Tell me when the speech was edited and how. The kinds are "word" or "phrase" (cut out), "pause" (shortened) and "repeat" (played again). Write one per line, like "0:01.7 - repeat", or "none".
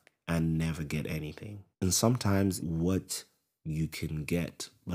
0:01.7 - pause
0:02.6 - phrase